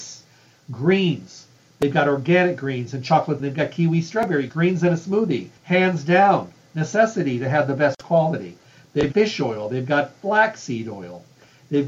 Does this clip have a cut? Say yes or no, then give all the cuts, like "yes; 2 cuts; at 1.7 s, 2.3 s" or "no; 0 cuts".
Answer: yes; 4 cuts; at 3.4 s, 4.5 s, 5.6 s, 9.1 s